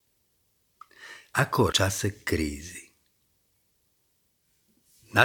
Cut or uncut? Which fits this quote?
cut